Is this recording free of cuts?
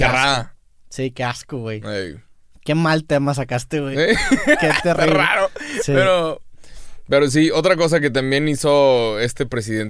yes; 0 cuts

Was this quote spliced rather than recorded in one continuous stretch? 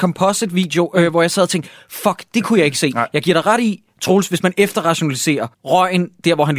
yes; 1 cut; at 5.5 s

